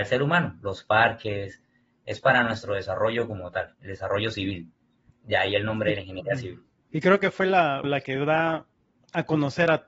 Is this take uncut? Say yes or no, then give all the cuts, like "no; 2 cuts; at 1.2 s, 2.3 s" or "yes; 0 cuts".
no; 2 cuts; at 6.8 s, 7.8 s